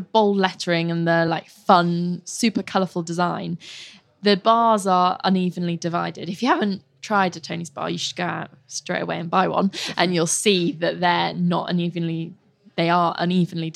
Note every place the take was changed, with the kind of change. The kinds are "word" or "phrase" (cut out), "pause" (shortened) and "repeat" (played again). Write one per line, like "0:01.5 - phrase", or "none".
none